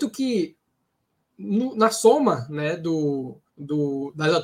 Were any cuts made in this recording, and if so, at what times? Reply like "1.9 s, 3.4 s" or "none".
3.5 s